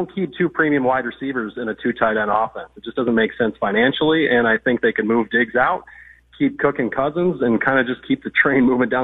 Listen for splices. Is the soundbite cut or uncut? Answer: uncut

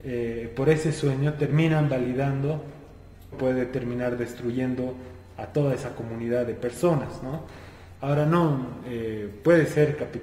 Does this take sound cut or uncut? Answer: cut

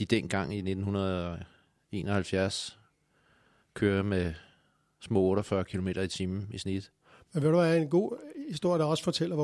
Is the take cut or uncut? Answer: uncut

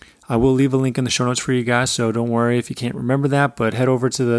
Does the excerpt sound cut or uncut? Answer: uncut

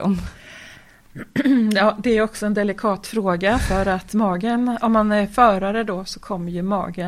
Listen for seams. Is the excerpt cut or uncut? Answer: uncut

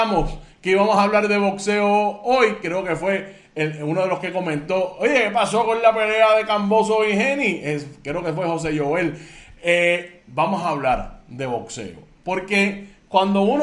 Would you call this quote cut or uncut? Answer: uncut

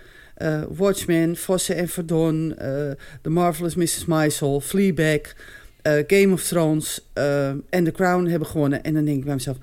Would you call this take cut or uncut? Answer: uncut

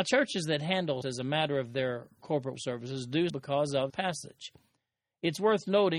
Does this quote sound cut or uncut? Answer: cut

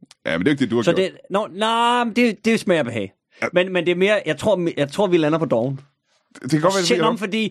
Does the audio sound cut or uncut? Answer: uncut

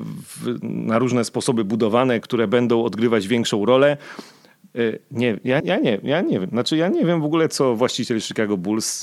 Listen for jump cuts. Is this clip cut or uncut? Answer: cut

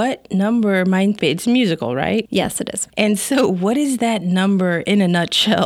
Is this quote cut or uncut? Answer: cut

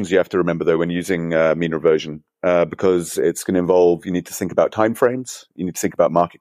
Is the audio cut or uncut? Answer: uncut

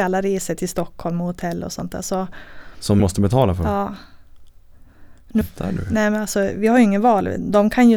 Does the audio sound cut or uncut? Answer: cut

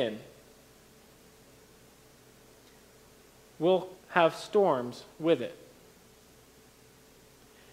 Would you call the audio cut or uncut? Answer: cut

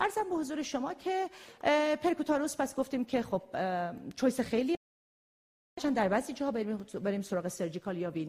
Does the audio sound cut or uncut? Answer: uncut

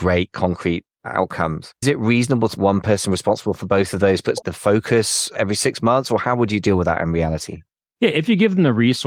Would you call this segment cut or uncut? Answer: cut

